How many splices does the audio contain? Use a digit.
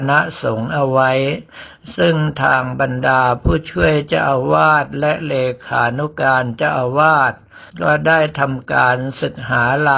1